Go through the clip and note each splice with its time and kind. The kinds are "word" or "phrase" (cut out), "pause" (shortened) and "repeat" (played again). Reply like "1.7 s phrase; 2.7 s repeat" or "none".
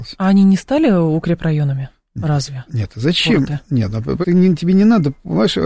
4.2 s word